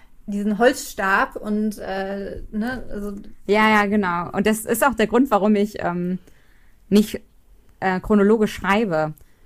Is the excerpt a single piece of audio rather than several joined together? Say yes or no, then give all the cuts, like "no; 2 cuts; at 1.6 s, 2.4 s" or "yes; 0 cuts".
yes; 0 cuts